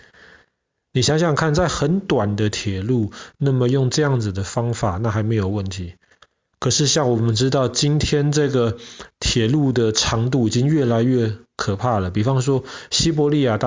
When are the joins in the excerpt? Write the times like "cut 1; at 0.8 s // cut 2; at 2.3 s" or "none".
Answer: none